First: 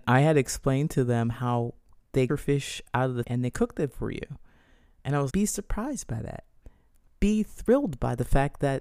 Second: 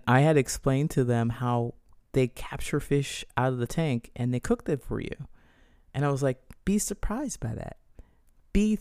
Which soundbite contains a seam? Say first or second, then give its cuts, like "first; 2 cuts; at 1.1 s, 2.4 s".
first; 3 cuts; at 2.3 s, 3.2 s, 5.3 s